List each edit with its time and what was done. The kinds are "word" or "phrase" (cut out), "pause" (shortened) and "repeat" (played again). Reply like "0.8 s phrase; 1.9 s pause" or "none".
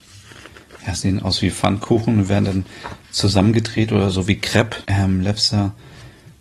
4.8 s pause